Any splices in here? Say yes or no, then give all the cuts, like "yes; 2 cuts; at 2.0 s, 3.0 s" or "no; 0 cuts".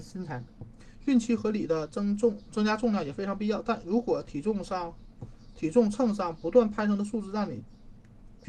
no; 0 cuts